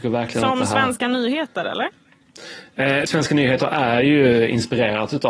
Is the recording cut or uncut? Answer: cut